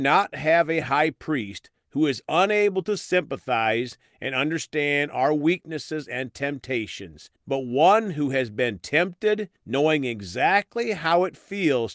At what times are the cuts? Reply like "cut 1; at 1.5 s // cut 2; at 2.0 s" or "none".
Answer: cut 1; at 7.4 s // cut 2; at 9.6 s